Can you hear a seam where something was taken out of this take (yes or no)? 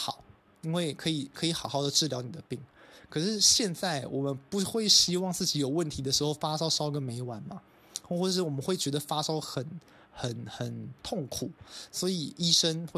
no